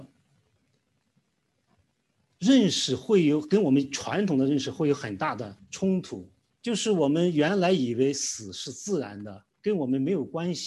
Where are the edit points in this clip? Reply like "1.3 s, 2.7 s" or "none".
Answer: 5.6 s, 6.5 s, 9.5 s